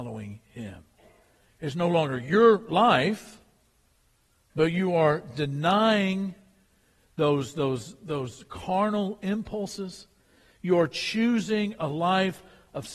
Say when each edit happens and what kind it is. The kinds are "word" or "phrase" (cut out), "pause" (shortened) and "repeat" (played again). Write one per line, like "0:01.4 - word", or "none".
none